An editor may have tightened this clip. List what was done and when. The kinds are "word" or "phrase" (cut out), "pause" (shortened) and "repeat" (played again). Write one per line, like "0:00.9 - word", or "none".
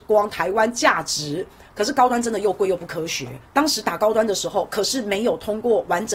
0:03.4 - pause